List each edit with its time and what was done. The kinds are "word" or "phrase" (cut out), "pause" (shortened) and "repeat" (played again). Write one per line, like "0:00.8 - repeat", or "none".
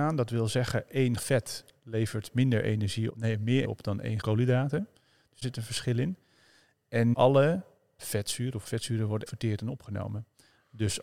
0:01.2 - word
0:03.1 - word
0:03.6 - word
0:04.2 - word
0:05.4 - word
0:07.1 - word
0:08.0 - word
0:08.6 - word
0:09.3 - word